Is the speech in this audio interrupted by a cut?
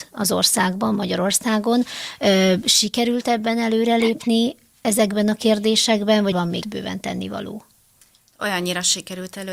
yes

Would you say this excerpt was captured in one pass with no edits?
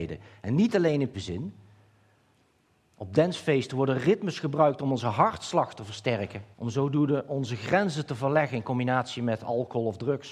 no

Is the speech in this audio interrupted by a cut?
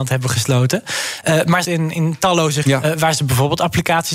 yes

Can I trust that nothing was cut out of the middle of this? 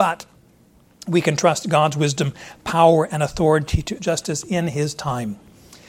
no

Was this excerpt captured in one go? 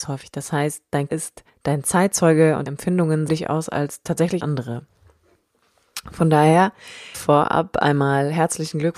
no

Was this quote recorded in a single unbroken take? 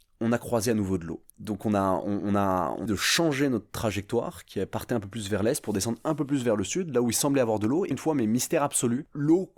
no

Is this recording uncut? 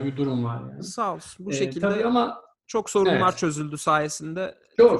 yes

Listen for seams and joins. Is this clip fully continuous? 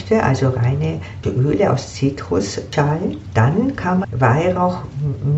no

